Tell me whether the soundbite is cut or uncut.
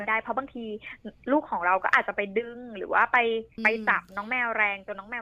cut